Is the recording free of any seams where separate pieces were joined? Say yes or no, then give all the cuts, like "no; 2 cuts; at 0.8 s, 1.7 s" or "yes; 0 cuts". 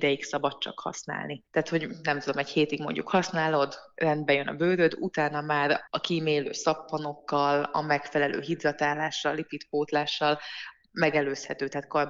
no; 2 cuts; at 1.5 s, 5.9 s